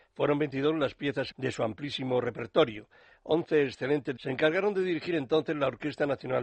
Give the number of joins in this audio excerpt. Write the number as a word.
two